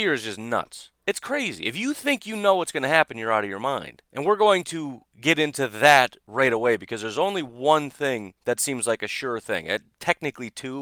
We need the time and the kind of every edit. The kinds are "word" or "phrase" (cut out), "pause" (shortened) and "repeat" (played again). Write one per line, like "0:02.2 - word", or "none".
0:04.1 - pause
0:08.4 - pause